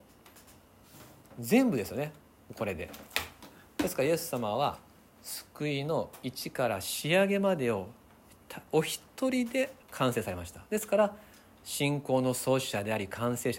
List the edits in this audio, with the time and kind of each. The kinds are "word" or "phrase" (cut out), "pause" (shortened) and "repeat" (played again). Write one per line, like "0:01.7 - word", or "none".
0:09.8 - pause